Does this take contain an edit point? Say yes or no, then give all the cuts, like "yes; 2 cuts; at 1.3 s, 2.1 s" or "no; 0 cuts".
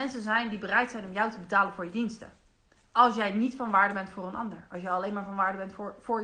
no; 0 cuts